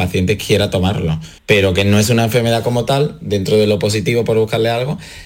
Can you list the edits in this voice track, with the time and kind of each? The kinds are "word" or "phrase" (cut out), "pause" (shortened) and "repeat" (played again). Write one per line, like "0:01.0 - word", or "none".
0:01.4 - pause